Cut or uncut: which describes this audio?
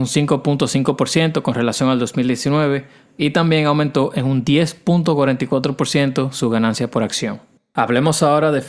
uncut